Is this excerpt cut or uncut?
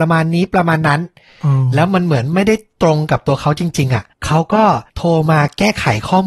cut